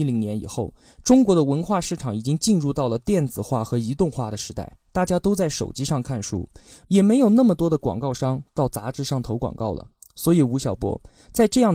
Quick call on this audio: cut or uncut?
uncut